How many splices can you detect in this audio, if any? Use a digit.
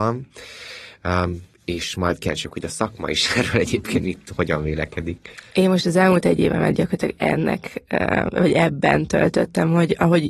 1